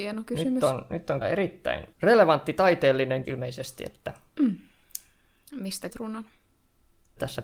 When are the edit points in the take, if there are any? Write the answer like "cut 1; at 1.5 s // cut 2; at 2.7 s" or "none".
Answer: cut 1; at 1.2 s // cut 2; at 1.9 s // cut 3; at 3.2 s // cut 4; at 5.9 s

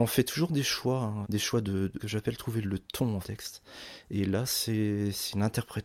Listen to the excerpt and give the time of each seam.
cut 1; at 1.2 s // cut 2; at 2.0 s // cut 3; at 2.6 s // cut 4; at 3.2 s

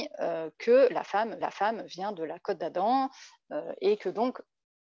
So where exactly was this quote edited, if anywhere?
cut 1; at 1.4 s

